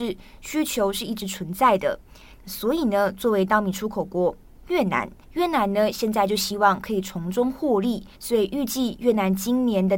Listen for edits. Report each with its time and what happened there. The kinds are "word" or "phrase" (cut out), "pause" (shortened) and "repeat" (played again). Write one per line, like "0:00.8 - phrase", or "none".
0:05.2 - pause
0:08.1 - pause